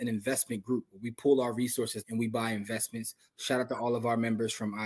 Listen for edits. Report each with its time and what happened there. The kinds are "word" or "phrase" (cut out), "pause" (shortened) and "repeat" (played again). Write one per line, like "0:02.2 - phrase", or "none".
0:02.0 - word